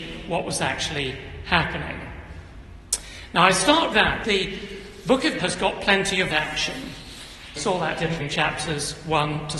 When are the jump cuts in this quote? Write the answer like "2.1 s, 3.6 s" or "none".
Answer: 3.9 s, 4.2 s, 5.4 s, 6.3 s, 7.6 s, 8.2 s